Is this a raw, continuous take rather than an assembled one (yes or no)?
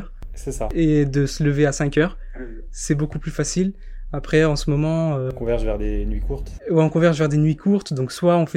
yes